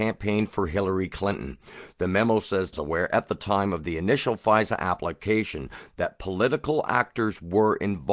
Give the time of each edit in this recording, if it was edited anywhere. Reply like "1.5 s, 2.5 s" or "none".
2.7 s